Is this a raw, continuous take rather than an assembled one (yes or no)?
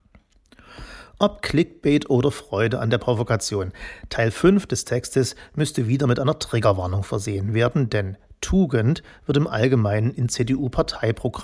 yes